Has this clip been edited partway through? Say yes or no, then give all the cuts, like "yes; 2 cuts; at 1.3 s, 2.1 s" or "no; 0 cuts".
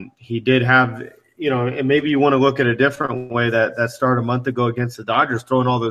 no; 0 cuts